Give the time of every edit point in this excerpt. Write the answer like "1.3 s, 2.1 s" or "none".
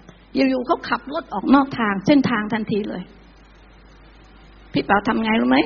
none